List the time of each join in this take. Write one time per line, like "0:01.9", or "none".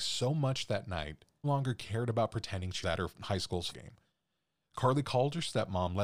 0:01.4
0:02.8
0:03.7

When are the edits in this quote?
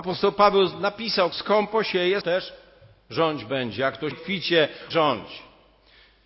0:01.3
0:02.2
0:04.1
0:04.9

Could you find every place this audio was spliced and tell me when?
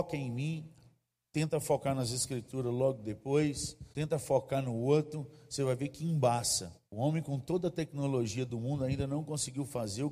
0:03.9
0:06.9

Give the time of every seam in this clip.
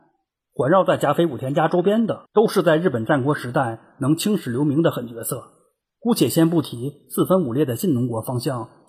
0:02.3
0:05.8

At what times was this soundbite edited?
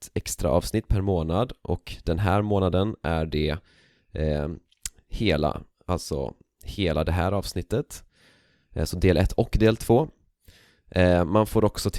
none

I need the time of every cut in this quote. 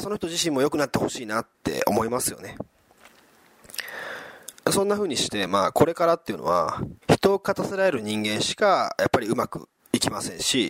0:01.5
0:04.6
0:07.0
0:09.8

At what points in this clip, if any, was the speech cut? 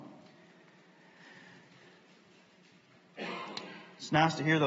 none

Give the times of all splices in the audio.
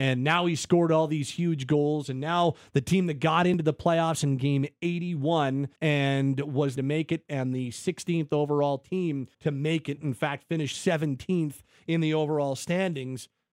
0:05.8
0:06.8
0:09.3

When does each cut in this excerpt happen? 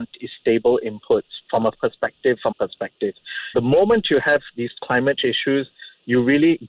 0:01.7
0:02.5
0:03.5
0:05.2

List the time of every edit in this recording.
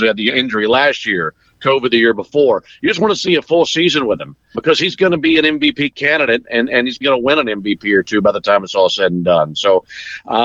0:04.5
0:07.0

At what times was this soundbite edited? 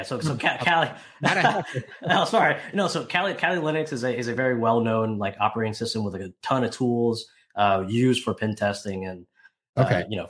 none

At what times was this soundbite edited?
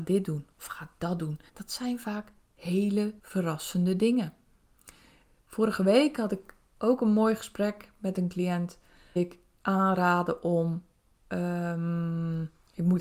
0:01.5
0:03.2
0:09.2

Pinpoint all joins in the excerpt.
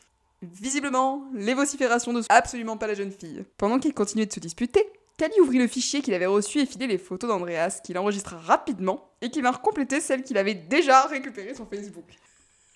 0:02.3
0:03.5
0:06.8

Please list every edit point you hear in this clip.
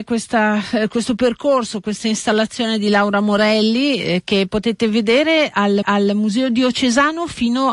0:05.8

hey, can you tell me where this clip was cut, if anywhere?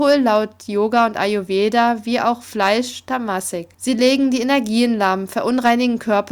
0:03.7

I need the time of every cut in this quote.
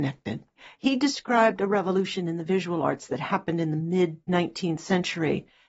0:04.2

